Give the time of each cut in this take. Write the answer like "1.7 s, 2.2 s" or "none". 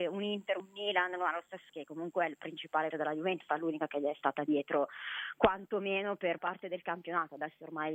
1.7 s, 2.9 s, 3.5 s, 6.4 s